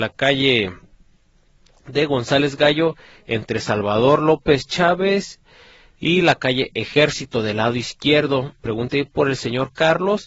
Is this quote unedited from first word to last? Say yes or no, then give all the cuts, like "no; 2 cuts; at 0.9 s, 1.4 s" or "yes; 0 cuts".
yes; 0 cuts